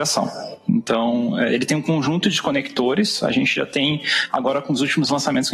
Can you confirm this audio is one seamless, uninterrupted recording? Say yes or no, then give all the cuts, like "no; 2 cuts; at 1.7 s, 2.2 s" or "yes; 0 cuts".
yes; 0 cuts